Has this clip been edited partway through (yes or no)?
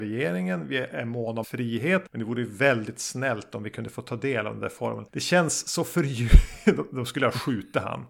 yes